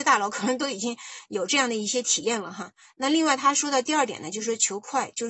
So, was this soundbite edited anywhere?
no; 0 cuts

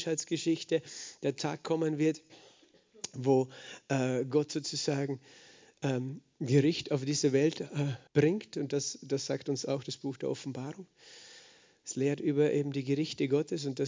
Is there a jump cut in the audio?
yes; 1 cut; at 8.1 s

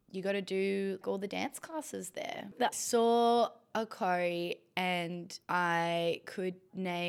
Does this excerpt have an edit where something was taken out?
yes; 2 cuts; at 1.0 s, 2.7 s

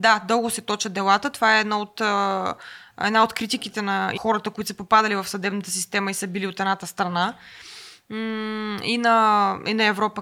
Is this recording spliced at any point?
yes; 1 cut; at 4.2 s

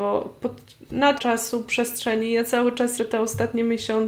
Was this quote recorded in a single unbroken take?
no; 2 cuts; at 1.2 s, 3.0 s

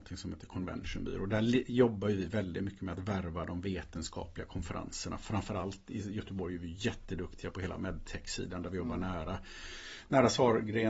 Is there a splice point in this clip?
no; 0 cuts

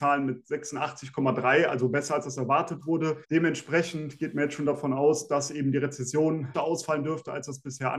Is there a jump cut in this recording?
yes; 2 cuts; at 3.2 s, 6.5 s

